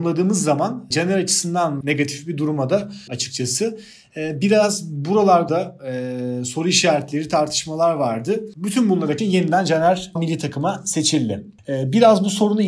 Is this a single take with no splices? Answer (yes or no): no